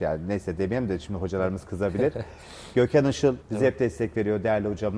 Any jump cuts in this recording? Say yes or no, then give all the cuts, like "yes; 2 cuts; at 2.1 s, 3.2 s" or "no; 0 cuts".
yes; 1 cut; at 3.4 s